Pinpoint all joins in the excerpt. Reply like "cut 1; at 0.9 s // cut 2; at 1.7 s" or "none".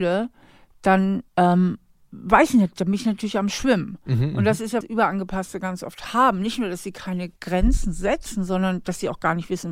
cut 1; at 1.3 s // cut 2; at 4.8 s // cut 3; at 7.4 s

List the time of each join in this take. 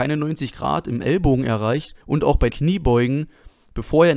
cut 1; at 2.0 s // cut 2; at 2.5 s

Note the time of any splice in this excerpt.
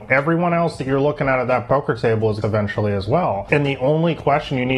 cut 1; at 2.4 s

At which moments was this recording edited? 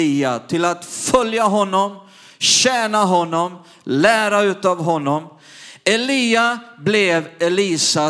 none

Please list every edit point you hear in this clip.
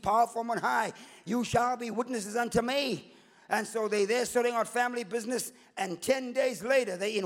none

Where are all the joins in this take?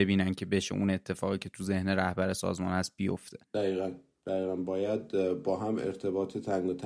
cut 1; at 3.4 s

